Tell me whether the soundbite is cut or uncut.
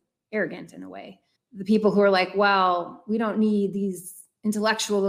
cut